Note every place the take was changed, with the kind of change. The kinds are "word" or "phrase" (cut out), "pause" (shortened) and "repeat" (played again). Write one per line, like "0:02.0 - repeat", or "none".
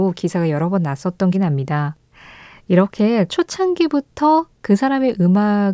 0:01.3 - word
0:03.3 - word